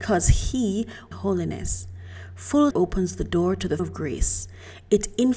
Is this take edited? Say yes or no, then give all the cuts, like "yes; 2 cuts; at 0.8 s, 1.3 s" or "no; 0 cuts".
yes; 3 cuts; at 1.1 s, 2.7 s, 3.8 s